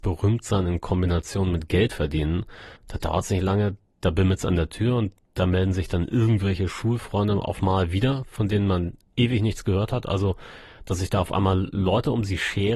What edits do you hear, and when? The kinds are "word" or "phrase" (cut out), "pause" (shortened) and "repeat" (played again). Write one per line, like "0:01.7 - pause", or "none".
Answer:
0:02.8 - pause